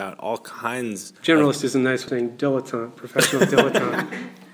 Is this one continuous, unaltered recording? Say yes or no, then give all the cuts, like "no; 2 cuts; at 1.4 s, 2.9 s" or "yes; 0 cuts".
no; 2 cuts; at 1.2 s, 2.1 s